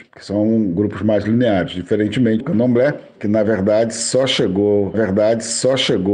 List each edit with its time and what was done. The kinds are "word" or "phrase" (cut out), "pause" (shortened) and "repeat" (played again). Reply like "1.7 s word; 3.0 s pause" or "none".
2.4 s word; 4.9 s repeat